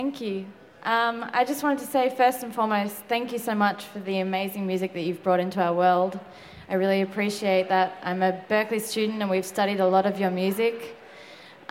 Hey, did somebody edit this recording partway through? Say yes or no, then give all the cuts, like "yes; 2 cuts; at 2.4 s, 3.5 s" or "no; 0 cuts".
no; 0 cuts